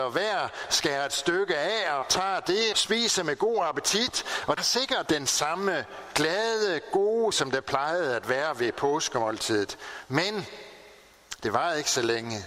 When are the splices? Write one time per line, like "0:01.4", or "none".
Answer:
0:02.0
0:02.7
0:04.6
0:05.0
0:07.3